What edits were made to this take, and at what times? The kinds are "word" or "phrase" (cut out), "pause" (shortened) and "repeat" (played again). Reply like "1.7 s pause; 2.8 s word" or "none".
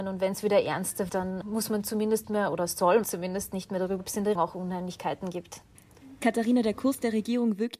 1.1 s word; 1.4 s word; 2.2 s word; 3.0 s word; 4.0 s word; 4.4 s word